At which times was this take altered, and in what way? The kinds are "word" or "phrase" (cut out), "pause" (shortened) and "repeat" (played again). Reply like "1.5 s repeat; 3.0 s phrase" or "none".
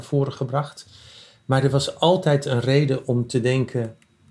none

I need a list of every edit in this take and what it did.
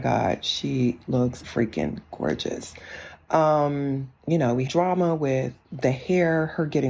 1.4 s word; 4.2 s pause; 4.7 s word; 5.6 s pause

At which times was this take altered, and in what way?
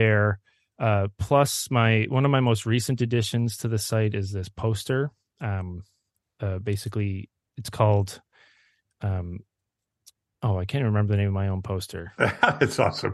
none

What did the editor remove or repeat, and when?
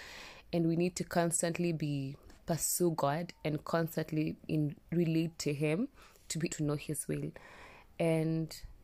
2.4 s word; 4.5 s word; 6.5 s word

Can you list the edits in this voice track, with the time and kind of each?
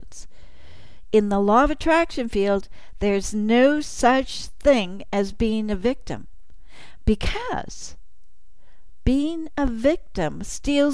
none

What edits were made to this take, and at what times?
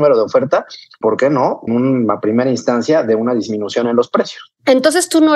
1.0 s word; 1.7 s word

